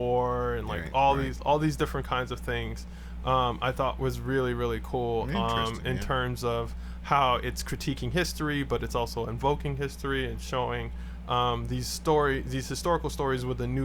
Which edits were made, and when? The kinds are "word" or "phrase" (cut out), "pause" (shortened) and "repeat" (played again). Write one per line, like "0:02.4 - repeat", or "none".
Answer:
none